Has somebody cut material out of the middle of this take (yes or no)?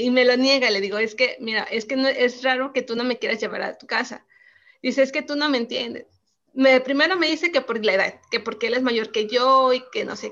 no